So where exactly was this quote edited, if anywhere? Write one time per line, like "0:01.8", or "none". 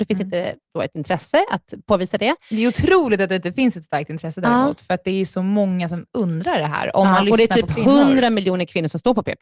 0:00.9